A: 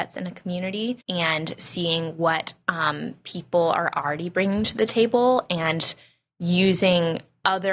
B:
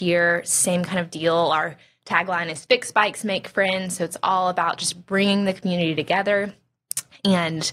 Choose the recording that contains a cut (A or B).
A